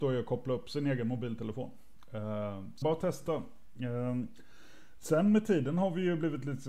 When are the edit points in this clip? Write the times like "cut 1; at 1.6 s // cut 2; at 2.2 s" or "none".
cut 1; at 2.8 s